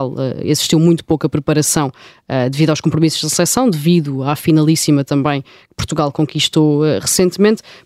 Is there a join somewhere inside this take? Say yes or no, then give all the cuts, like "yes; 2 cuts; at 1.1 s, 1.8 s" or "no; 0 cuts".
no; 0 cuts